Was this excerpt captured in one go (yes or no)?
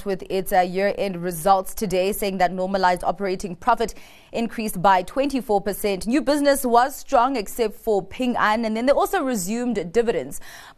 yes